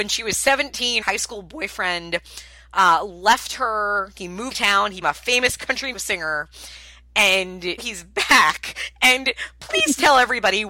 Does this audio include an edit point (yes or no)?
yes